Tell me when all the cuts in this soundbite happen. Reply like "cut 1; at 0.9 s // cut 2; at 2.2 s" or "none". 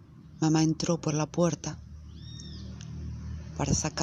none

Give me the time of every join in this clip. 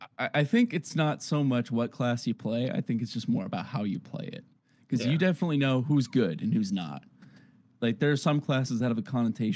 none

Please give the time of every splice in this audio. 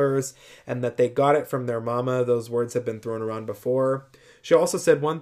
none

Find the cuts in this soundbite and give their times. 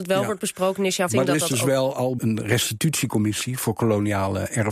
cut 1; at 1.1 s // cut 2; at 2.2 s

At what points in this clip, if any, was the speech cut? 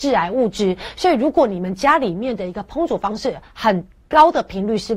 none

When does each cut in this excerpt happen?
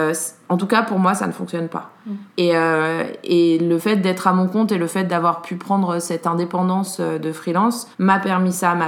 cut 1; at 2.3 s // cut 2; at 7.9 s

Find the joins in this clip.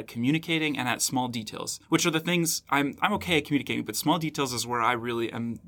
cut 1; at 1.8 s

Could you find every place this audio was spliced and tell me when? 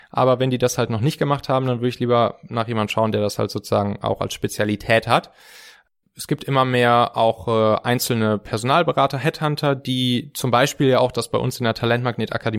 none

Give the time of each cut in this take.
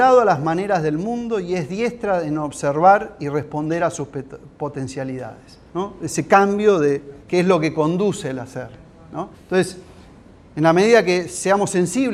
cut 1; at 5.7 s // cut 2; at 7.2 s // cut 3; at 9.3 s

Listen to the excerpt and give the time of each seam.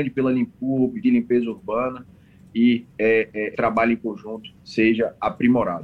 cut 1; at 1.0 s // cut 2; at 2.9 s // cut 3; at 3.5 s // cut 4; at 4.6 s

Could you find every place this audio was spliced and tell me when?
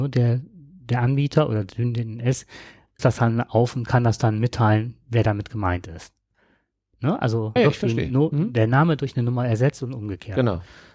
cut 1; at 3.0 s // cut 2; at 7.6 s

